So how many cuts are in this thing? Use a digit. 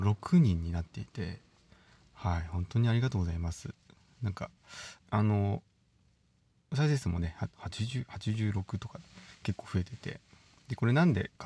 2